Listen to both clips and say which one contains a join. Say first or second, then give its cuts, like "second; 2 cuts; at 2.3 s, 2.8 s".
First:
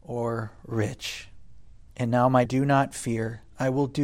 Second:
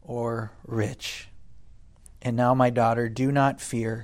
first; 2 cuts; at 1.9 s, 2.5 s